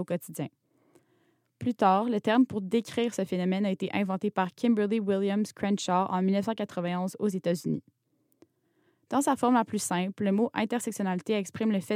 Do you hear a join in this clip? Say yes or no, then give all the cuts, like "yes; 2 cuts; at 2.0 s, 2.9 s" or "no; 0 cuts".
no; 0 cuts